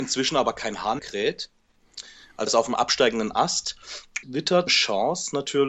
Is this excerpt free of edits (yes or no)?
no